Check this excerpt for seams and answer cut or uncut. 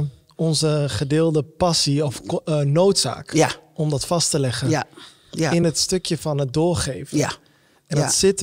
uncut